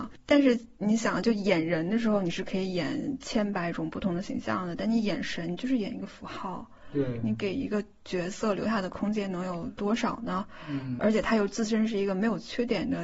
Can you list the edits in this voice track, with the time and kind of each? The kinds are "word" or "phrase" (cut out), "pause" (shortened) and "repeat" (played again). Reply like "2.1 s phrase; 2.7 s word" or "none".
11.0 s word